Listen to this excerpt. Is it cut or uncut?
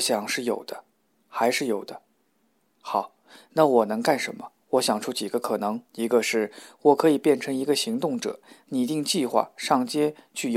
cut